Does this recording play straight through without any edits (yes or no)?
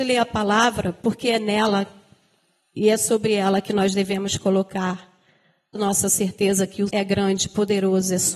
no